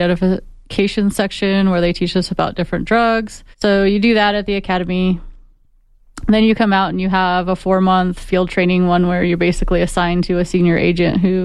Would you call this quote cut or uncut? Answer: cut